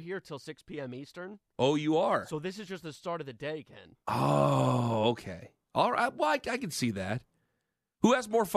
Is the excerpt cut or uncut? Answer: uncut